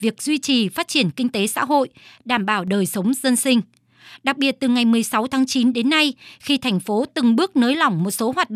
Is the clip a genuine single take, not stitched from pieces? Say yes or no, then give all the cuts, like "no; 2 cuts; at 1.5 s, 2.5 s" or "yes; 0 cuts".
yes; 0 cuts